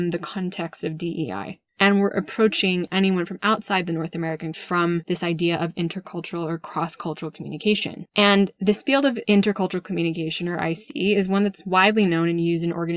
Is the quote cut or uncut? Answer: cut